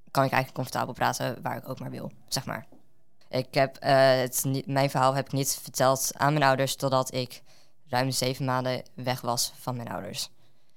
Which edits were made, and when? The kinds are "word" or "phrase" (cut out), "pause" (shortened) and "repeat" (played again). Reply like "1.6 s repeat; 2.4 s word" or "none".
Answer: none

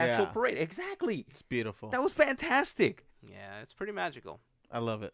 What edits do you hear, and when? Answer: 3.1 s pause

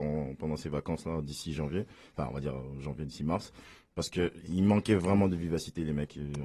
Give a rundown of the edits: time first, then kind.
none

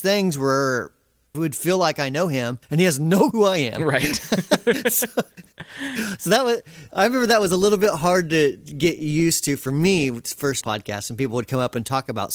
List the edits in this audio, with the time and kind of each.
1.3 s word; 2.6 s pause; 3.3 s word; 10.6 s phrase

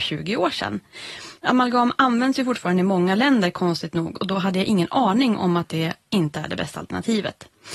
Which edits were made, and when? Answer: 1.4 s pause

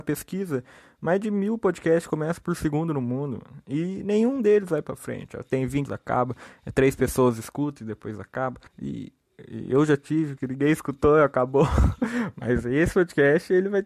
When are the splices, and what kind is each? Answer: 5.9 s word; 8.7 s pause; 10.4 s word

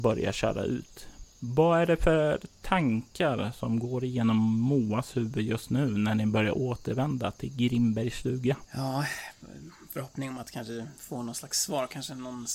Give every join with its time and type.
none

